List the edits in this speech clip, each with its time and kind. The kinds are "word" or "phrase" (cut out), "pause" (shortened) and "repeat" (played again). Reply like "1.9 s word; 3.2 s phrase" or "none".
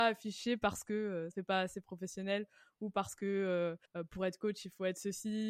1.3 s word; 3.9 s pause